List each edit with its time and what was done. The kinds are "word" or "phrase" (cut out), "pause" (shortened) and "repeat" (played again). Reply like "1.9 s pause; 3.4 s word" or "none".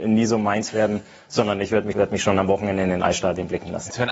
1.9 s word